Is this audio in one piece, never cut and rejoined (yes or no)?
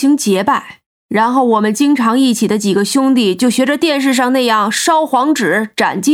yes